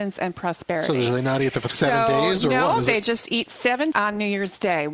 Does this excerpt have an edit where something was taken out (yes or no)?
yes